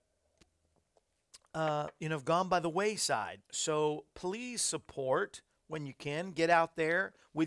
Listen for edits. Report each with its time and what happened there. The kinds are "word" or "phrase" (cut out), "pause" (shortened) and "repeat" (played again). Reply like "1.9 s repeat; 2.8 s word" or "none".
3.4 s pause